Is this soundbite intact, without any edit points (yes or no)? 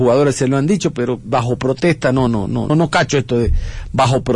no